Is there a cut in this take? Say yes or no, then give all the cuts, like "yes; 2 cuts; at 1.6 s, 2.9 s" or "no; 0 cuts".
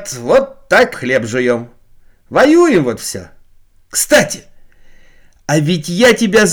yes; 1 cut; at 0.9 s